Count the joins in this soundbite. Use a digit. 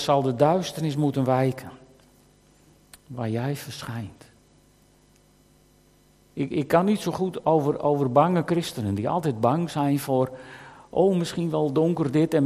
0